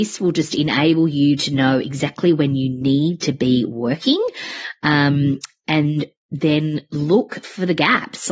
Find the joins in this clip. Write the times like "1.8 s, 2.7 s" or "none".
none